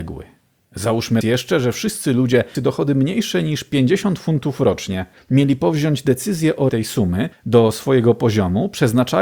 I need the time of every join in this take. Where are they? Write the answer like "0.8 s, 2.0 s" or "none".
1.2 s, 2.5 s, 5.1 s, 6.7 s, 7.3 s

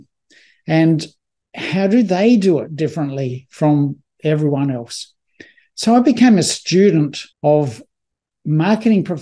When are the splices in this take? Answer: 7.3 s

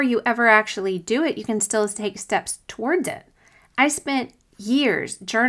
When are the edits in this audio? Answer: none

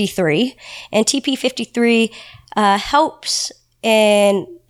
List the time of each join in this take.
none

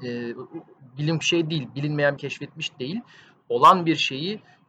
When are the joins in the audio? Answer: 1.2 s, 2.2 s

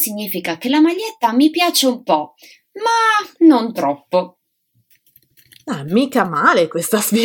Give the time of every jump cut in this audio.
none

